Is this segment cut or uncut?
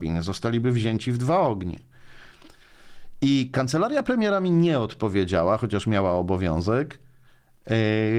uncut